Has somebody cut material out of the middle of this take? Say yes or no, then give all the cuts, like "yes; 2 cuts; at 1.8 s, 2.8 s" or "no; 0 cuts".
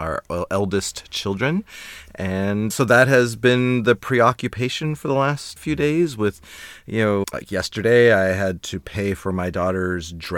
yes; 3 cuts; at 2.7 s, 5.6 s, 7.2 s